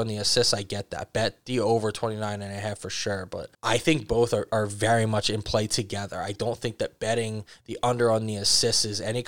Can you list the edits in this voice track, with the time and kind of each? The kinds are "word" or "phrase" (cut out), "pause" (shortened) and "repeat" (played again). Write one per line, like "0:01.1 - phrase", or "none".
0:03.5 - pause